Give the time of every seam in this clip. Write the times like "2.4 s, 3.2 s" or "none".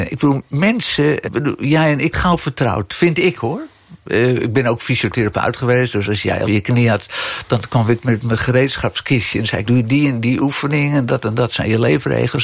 1.2 s, 2.1 s, 6.5 s, 9.7 s